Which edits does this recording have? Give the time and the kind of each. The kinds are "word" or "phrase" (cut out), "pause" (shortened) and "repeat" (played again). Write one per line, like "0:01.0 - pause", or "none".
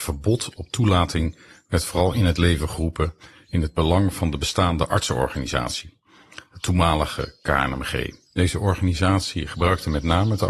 0:08.3 - pause